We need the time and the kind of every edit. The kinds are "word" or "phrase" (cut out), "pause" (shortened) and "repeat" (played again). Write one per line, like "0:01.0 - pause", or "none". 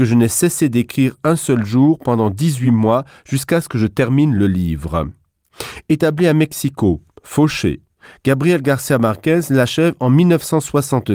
none